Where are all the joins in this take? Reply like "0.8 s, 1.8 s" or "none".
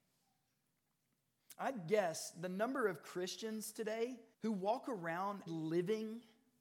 4.3 s, 5.5 s